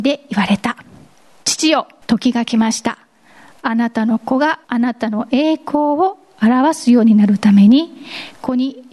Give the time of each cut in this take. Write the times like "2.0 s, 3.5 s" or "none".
2.0 s, 4.6 s